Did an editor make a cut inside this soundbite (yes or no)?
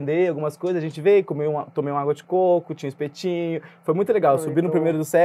no